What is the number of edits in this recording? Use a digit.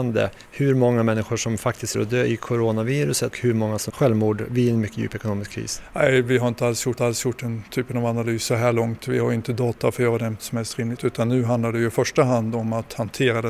6